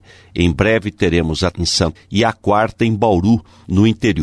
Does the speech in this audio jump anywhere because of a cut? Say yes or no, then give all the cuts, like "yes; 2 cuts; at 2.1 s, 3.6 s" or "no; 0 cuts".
yes; 2 cuts; at 1.5 s, 1.9 s